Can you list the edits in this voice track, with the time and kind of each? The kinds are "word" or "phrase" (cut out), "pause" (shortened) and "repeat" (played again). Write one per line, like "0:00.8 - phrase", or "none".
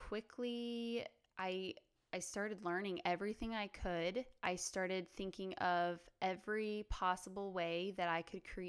none